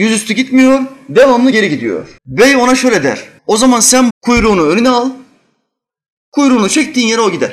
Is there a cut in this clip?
yes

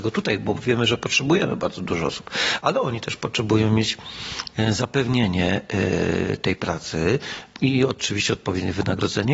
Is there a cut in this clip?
no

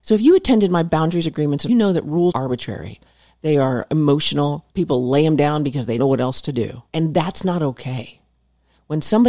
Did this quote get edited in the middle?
yes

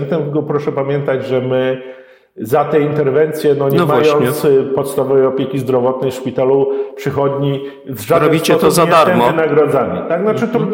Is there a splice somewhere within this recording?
no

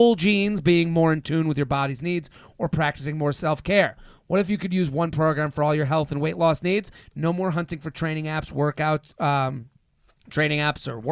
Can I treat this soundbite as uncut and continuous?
yes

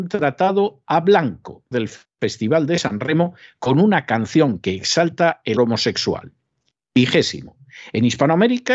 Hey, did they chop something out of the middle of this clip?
yes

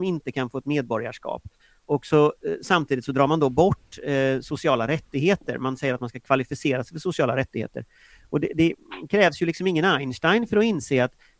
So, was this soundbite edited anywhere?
no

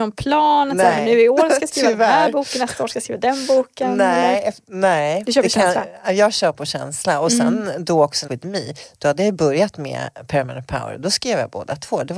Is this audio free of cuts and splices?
no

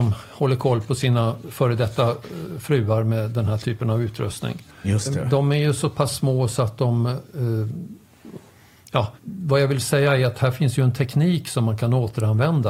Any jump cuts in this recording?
yes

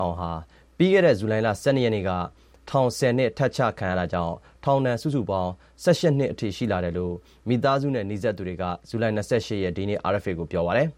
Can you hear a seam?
no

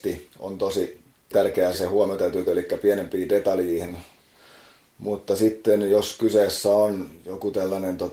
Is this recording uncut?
no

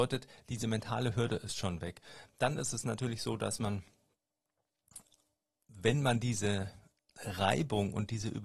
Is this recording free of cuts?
yes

